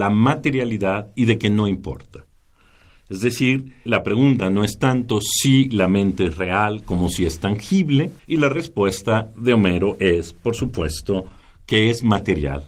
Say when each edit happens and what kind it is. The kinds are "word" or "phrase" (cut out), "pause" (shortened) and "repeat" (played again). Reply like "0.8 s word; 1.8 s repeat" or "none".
3.9 s word; 8.2 s pause